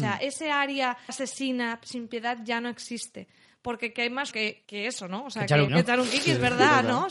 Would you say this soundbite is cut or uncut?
cut